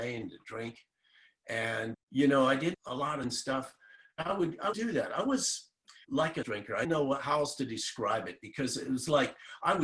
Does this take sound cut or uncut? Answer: cut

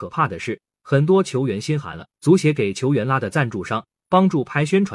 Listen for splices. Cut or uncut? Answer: cut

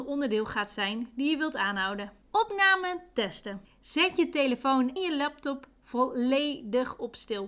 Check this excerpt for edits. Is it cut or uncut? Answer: cut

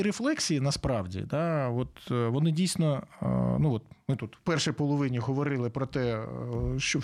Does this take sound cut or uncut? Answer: uncut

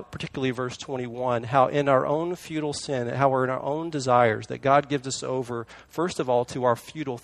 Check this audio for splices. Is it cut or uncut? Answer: uncut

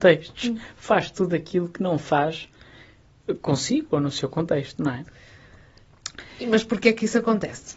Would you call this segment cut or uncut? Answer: uncut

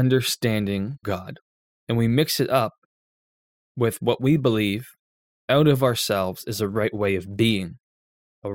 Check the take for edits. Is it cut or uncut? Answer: cut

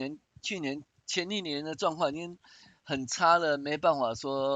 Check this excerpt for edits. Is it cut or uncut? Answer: uncut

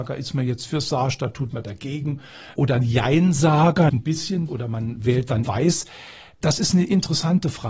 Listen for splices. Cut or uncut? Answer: cut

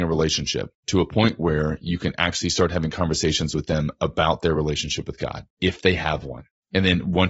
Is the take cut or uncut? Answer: uncut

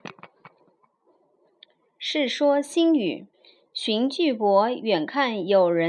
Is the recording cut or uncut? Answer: cut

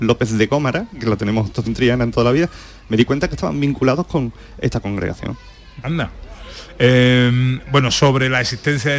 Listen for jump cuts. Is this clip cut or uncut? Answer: cut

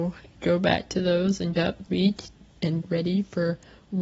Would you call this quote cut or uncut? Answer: cut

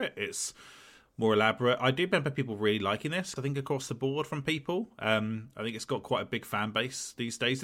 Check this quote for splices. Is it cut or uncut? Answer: cut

